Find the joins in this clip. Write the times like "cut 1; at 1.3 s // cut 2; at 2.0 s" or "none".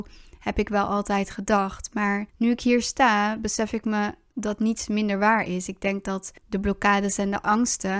cut 1; at 2.3 s // cut 2; at 6.4 s